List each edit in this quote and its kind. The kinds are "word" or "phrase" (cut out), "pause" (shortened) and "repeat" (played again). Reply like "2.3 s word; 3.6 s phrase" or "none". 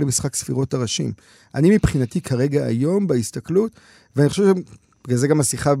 none